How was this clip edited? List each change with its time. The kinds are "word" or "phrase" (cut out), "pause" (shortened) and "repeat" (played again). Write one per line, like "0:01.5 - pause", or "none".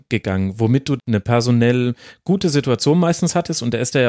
0:01.0 - word